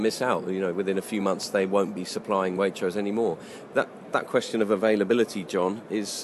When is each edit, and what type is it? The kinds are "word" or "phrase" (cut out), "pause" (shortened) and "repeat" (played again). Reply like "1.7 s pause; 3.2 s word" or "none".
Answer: none